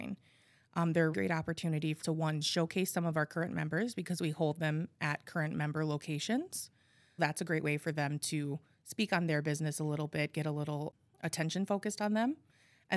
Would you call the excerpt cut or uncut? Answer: cut